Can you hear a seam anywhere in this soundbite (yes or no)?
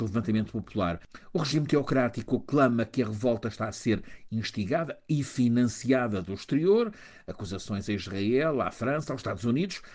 no